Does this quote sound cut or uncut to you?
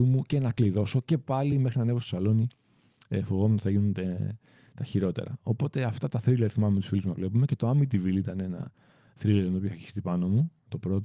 uncut